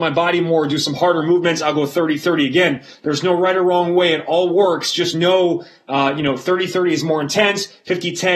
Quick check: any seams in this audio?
no; 0 cuts

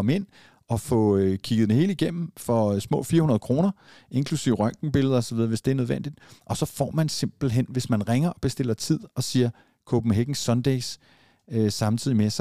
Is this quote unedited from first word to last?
yes; 0 cuts

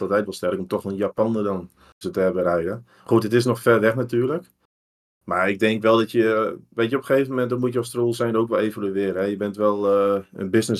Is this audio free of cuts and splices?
no; 2 cuts; at 2.0 s, 3.6 s

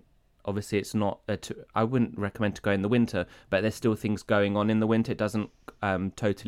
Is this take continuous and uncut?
yes; 0 cuts

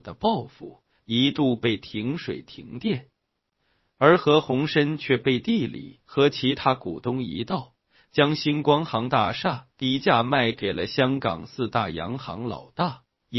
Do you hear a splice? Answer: no; 0 cuts

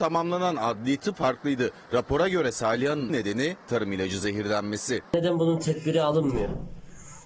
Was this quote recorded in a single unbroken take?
no; 2 cuts; at 1.2 s, 3.1 s

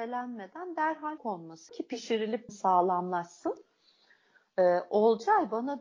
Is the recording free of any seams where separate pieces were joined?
no; 3 cuts; at 1.2 s, 1.7 s, 2.5 s

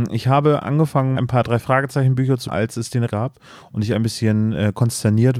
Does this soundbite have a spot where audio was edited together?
yes; 3 cuts; at 1.2 s, 2.5 s, 3.1 s

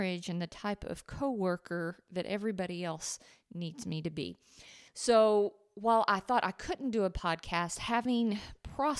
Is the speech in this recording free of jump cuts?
no; 1 cut; at 4.9 s

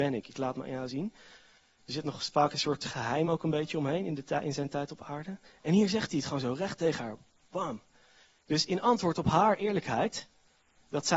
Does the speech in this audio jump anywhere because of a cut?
no; 0 cuts

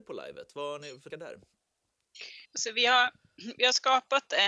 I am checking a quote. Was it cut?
yes; 2 cuts; at 1.1 s, 2.4 s

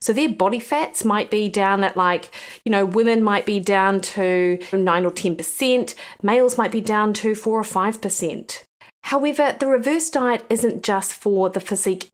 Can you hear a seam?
no; 0 cuts

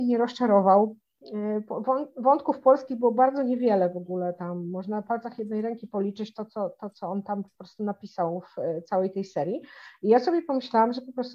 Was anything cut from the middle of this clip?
no; 0 cuts

